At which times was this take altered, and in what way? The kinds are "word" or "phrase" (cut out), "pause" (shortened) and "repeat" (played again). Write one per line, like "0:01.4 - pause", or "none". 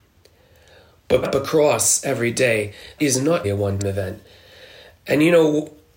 0:01.2 - word
0:03.0 - word
0:03.4 - word
0:03.8 - word